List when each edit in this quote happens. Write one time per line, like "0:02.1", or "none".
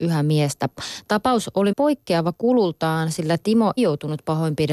0:01.7
0:03.8